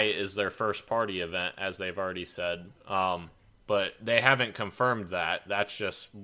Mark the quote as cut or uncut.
uncut